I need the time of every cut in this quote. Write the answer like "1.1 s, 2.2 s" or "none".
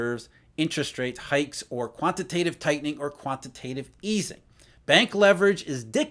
none